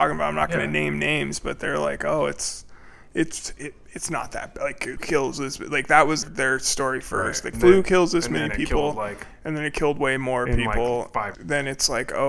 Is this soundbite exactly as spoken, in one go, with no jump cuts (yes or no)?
no